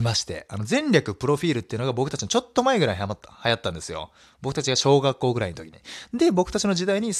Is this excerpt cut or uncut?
uncut